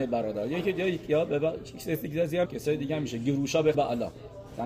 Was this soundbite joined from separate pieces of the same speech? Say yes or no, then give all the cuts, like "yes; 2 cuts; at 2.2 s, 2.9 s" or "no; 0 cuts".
yes; 2 cuts; at 2.5 s, 3.7 s